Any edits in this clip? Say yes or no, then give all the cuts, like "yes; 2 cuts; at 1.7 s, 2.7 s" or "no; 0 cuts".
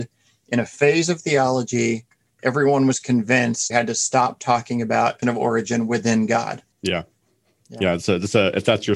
yes; 4 cuts; at 2.3 s, 3.7 s, 5.2 s, 6.7 s